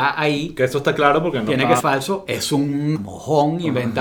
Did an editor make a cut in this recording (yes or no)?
yes